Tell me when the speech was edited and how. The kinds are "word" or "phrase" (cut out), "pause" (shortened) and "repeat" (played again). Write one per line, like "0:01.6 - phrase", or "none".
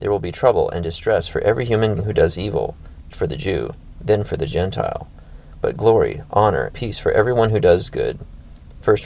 0:02.0 - word
0:03.1 - word
0:06.7 - word